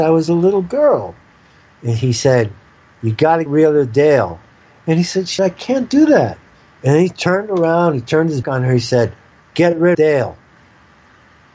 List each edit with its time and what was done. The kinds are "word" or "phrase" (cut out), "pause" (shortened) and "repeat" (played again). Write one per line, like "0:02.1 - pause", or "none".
0:03.5 - word
0:05.4 - word
0:08.4 - word
0:09.9 - word